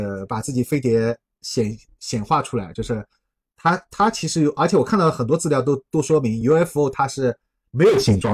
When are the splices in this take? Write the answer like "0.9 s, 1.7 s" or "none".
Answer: none